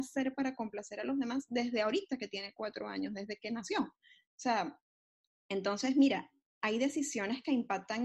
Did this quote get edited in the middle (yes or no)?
no